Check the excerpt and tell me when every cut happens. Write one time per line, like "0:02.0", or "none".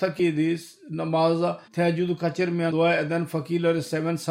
0:01.7